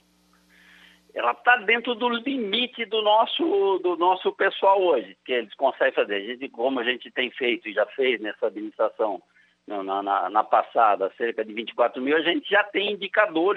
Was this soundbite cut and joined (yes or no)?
no